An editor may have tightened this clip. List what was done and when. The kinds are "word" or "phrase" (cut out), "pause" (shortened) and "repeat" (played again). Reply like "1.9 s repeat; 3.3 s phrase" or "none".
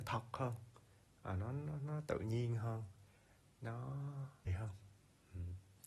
4.5 s word